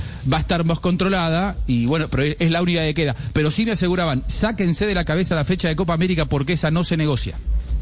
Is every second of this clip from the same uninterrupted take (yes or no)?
yes